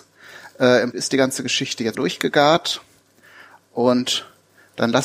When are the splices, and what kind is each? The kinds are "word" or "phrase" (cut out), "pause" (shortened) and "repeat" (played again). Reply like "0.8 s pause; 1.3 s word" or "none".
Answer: 0.9 s word; 1.9 s word

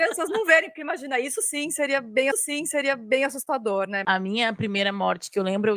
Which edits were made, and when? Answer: 2.3 s repeat

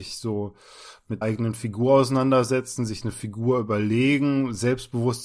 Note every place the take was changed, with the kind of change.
1.2 s word

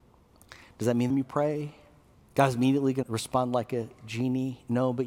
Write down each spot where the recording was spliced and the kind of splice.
1.1 s phrase; 2.1 s pause; 3.0 s word

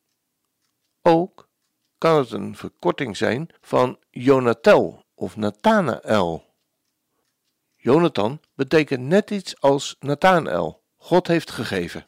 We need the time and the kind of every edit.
3.6 s pause; 7.2 s pause; 10.9 s pause

